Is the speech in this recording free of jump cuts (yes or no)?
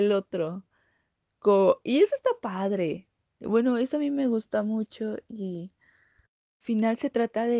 yes